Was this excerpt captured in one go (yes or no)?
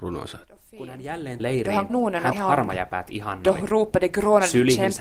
no